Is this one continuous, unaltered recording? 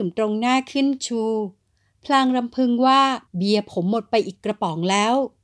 no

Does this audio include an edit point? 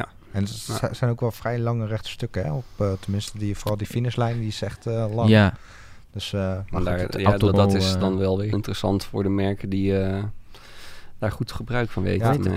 yes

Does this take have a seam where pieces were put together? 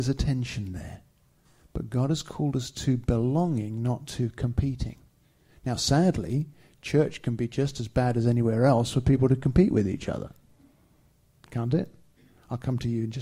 no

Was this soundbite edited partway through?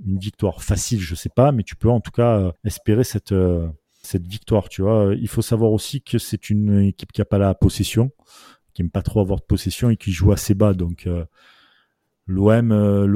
yes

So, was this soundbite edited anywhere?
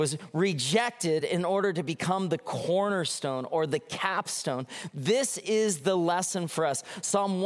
no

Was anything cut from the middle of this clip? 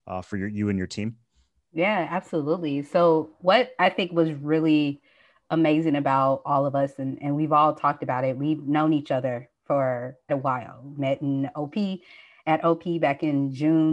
yes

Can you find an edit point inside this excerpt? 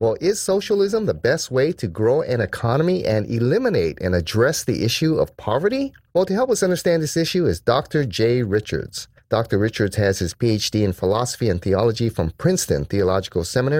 no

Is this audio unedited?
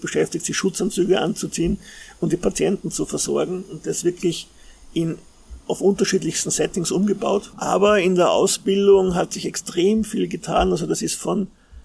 yes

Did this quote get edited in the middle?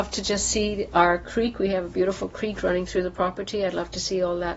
no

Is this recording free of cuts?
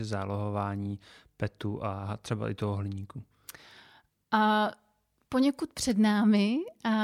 yes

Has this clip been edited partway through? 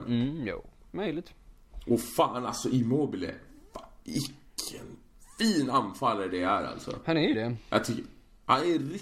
yes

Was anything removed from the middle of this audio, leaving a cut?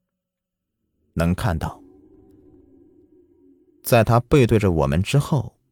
no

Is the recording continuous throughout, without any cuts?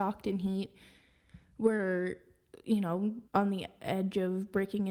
no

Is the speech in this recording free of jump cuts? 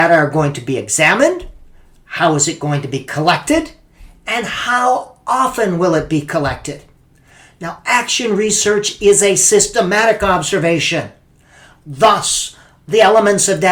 yes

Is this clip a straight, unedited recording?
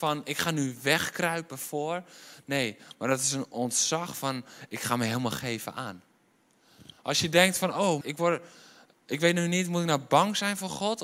no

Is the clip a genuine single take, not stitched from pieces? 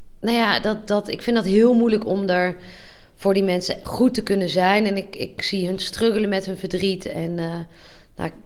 yes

